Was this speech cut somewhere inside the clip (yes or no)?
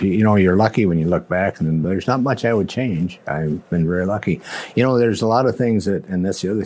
no